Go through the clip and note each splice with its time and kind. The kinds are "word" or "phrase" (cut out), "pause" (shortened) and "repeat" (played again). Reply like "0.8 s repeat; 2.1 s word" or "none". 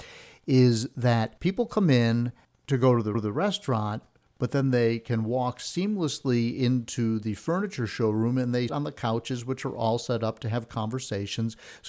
1.4 s pause; 2.4 s pause; 3.1 s repeat; 8.7 s word